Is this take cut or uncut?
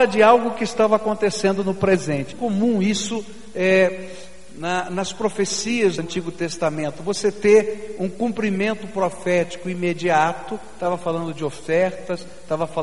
cut